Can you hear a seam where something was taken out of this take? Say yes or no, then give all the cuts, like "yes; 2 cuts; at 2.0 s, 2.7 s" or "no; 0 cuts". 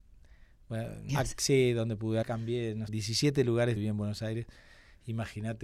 yes; 4 cuts; at 1.1 s, 2.2 s, 2.9 s, 3.8 s